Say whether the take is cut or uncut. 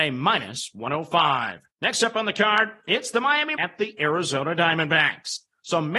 cut